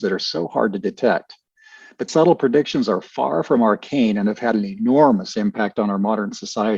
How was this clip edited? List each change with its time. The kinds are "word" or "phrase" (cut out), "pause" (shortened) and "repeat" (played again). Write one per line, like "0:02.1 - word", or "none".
0:02.1 - word